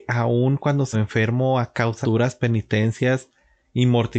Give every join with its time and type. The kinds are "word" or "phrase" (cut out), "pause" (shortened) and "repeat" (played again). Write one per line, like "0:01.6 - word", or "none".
0:00.9 - phrase
0:02.0 - phrase